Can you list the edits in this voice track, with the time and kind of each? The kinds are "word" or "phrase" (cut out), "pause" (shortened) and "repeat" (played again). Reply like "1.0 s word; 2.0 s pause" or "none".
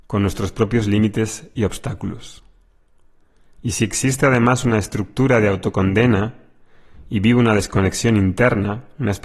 none